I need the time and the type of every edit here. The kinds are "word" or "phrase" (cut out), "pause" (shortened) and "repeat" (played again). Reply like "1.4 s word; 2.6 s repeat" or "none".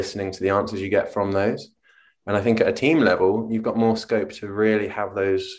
none

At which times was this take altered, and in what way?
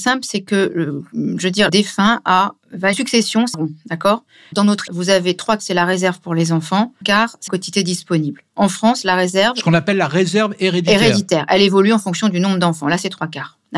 1.7 s word; 2.9 s word; 3.5 s word; 4.5 s word; 4.9 s word; 5.6 s word; 7.0 s word; 7.5 s word

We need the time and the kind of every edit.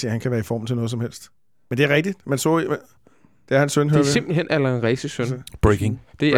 none

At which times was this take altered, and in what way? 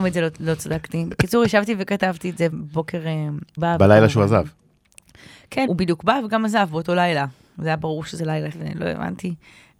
2.5 s word; 3.6 s word; 5.7 s word; 8.5 s word

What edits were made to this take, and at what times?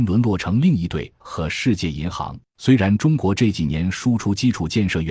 1.2 s word; 2.5 s pause

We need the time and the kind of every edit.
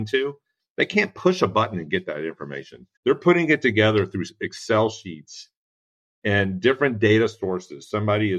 3.0 s pause

